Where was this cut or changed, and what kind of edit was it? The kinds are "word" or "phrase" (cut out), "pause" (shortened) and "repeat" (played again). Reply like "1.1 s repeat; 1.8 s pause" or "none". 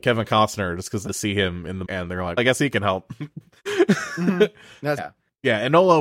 1.1 s word; 1.8 s word; 2.4 s word; 5.0 s word